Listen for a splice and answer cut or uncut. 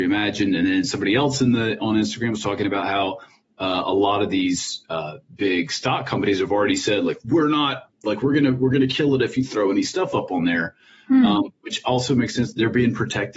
uncut